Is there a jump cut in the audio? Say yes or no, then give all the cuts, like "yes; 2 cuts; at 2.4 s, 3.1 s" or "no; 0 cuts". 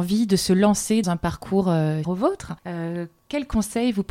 yes; 3 cuts; at 1.0 s, 2.0 s, 2.6 s